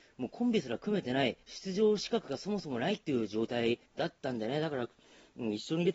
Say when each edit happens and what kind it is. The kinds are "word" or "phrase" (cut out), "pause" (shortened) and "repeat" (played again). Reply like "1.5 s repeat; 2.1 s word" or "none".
1.4 s pause; 3.9 s pause